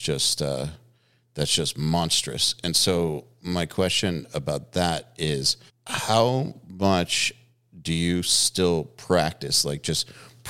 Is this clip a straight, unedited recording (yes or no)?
yes